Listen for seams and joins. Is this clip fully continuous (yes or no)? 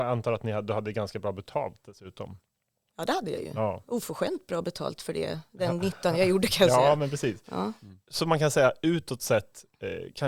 yes